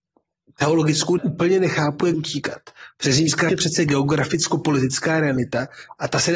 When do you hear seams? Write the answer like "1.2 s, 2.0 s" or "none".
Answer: 1.2 s, 2.1 s, 3.5 s